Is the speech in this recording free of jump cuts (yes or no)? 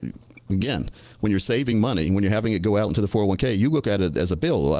yes